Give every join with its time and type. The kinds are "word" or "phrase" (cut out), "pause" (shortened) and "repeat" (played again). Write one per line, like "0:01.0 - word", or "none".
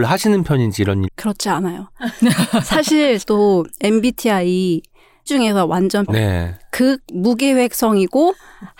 0:01.0 - word
0:03.2 - word
0:05.3 - word
0:06.1 - word